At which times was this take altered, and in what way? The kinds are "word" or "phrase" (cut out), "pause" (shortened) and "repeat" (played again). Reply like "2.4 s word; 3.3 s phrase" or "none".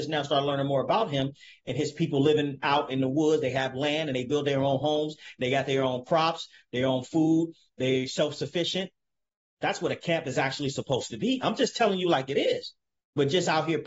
none